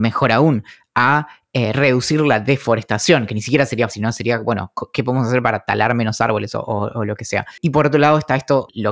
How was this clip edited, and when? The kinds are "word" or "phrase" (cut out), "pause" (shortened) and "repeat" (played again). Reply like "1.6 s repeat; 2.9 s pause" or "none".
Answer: 3.9 s word

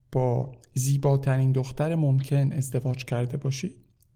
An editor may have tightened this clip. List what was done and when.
none

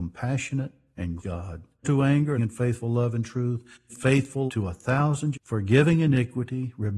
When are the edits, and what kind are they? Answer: 1.2 s word; 1.8 s word; 2.4 s word; 3.9 s word; 4.5 s word; 5.3 s word

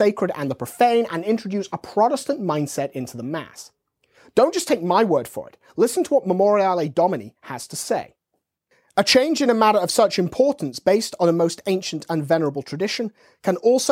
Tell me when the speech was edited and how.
none

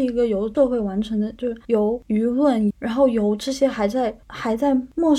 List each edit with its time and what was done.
2.7 s phrase

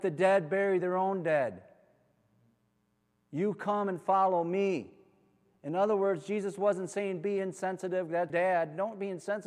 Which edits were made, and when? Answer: 8.3 s word

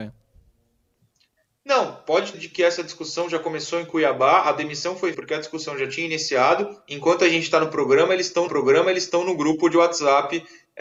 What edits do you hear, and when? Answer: 2.3 s phrase; 5.1 s word; 8.5 s repeat

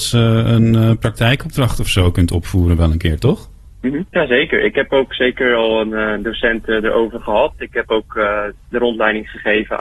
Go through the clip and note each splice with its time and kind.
4.1 s pause

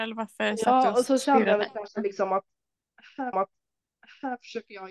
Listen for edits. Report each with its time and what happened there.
3.3 s repeat

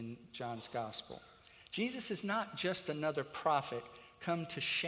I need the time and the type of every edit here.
none

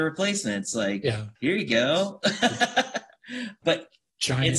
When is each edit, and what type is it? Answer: 1.4 s pause; 3.6 s word

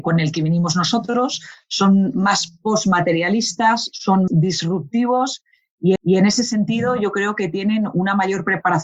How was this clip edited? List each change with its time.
4.3 s word; 6.0 s repeat

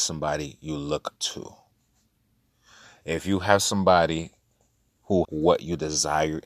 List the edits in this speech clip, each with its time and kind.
1.2 s word; 5.2 s word

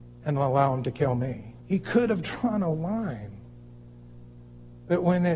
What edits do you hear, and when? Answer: 1.6 s pause

